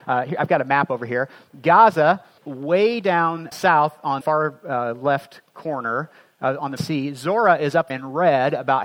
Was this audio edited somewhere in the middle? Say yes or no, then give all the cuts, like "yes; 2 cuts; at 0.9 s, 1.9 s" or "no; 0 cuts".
yes; 5 cuts; at 2.4 s, 3.5 s, 4.2 s, 6.8 s, 7.9 s